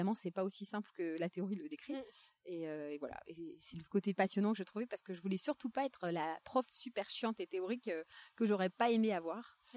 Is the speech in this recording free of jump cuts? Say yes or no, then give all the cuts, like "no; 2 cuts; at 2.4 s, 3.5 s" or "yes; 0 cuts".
yes; 0 cuts